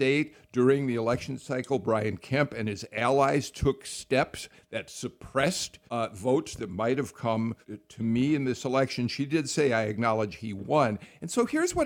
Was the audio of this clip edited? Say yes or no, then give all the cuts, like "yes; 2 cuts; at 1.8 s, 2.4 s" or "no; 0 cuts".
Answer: yes; 2 cuts; at 5.9 s, 7.6 s